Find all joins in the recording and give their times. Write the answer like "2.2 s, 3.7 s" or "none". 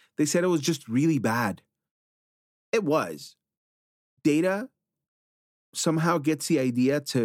none